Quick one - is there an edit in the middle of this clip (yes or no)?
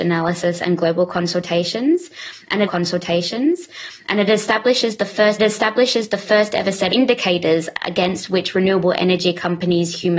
yes